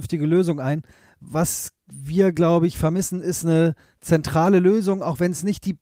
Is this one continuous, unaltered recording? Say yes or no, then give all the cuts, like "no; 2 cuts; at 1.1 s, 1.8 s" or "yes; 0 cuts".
yes; 0 cuts